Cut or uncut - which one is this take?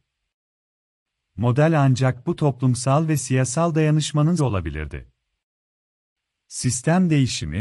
cut